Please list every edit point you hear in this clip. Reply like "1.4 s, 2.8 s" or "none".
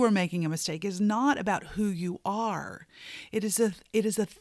none